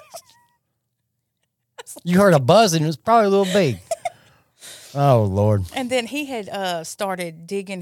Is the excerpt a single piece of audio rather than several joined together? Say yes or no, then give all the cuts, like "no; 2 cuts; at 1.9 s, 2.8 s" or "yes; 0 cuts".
yes; 0 cuts